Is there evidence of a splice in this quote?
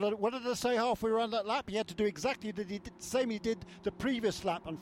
no; 0 cuts

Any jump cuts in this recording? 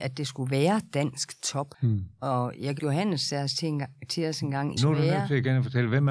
yes; 2 cuts; at 2.8 s, 4.8 s

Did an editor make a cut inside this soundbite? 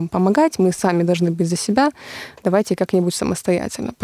no; 0 cuts

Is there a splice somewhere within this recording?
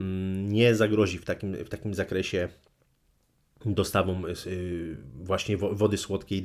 no; 0 cuts

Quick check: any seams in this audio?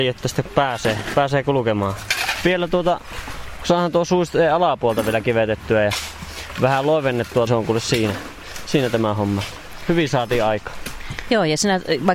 yes; 1 cut; at 7.5 s

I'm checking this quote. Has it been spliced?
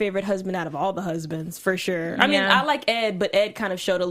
no; 0 cuts

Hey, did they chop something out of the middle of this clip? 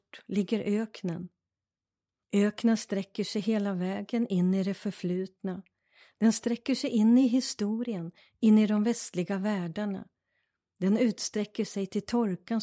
no; 0 cuts

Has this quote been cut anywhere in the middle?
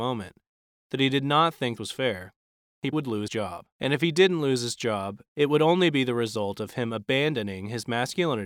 yes; 4 cuts; at 1.8 s, 2.9 s, 3.3 s, 3.7 s

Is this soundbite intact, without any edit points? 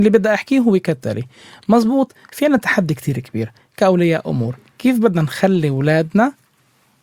yes; 0 cuts

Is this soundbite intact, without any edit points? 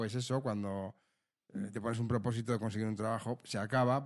yes; 0 cuts

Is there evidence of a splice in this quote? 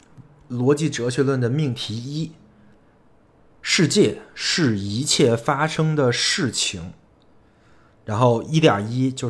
no; 0 cuts

